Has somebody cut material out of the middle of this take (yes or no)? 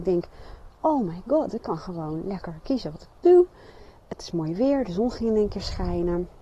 no